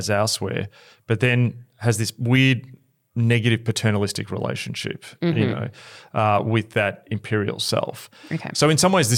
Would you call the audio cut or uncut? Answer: uncut